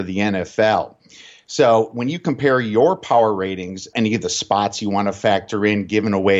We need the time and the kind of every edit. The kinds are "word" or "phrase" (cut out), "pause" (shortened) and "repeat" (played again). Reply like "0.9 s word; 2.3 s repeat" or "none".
3.9 s phrase